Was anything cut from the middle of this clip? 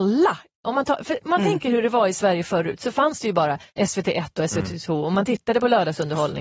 yes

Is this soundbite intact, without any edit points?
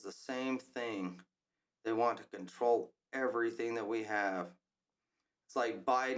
yes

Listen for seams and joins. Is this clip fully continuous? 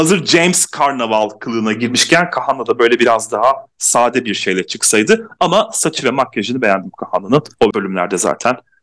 no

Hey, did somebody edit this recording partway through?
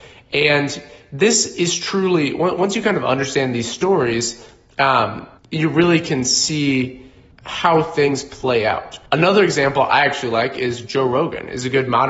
yes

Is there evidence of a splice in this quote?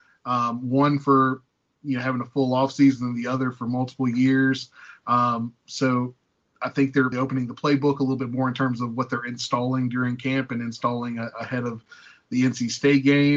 yes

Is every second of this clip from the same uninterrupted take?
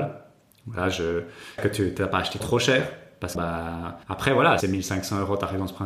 no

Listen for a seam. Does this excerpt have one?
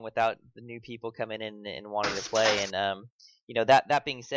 no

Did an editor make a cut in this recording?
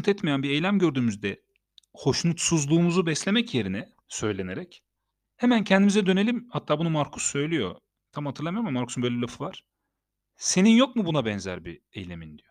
yes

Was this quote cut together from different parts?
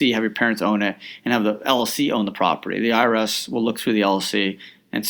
no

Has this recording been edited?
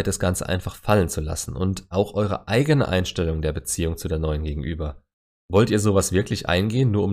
no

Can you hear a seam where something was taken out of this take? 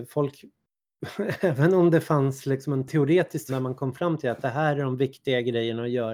yes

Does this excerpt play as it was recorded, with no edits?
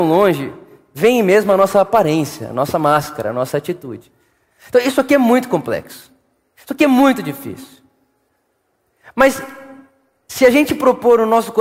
yes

